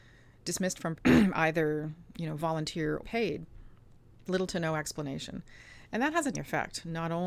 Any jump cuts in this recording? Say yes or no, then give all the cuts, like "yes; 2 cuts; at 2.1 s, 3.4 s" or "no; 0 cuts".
yes; 4 cuts; at 1.0 s, 3.0 s, 4.3 s, 6.3 s